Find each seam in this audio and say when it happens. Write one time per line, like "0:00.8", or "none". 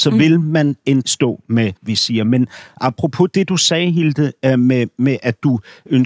0:01.0
0:01.8